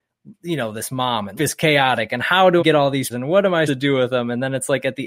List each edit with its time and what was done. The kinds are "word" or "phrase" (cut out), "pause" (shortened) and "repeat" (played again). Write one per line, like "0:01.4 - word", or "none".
0:01.4 - word
0:02.6 - word
0:03.1 - word
0:03.7 - word